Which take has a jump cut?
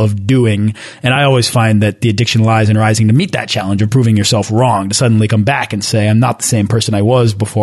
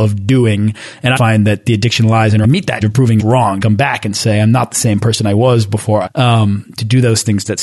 second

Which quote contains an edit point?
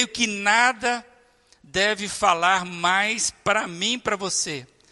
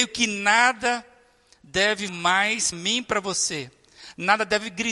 second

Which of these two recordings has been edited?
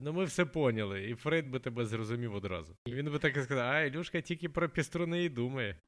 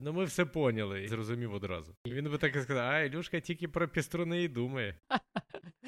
second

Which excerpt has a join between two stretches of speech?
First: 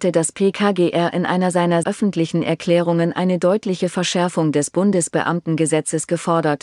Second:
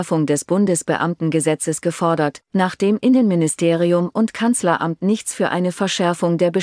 first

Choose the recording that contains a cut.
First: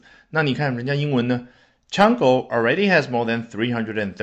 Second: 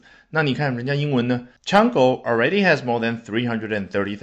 second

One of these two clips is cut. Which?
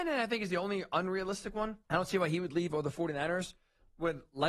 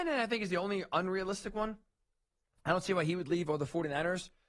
first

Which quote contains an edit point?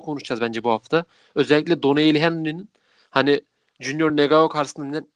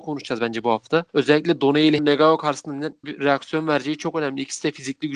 second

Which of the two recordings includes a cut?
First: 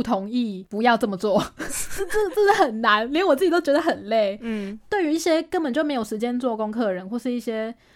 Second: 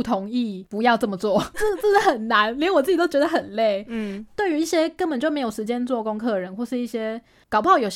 second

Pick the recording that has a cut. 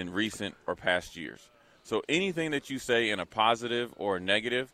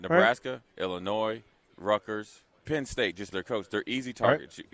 second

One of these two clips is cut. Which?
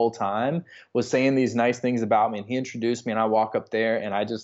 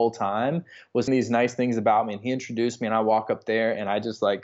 second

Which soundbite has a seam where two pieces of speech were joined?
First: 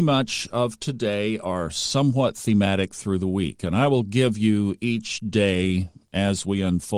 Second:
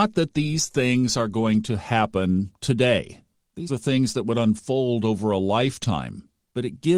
second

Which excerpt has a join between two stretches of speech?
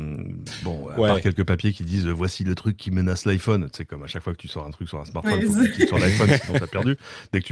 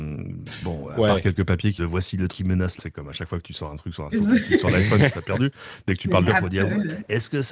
second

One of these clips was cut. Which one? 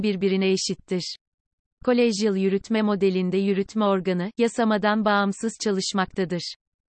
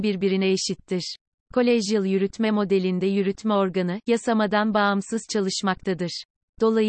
second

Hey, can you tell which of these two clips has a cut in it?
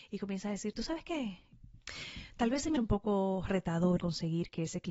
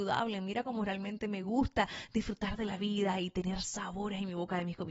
first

